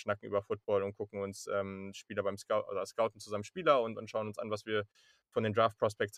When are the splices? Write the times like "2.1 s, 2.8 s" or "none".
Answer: none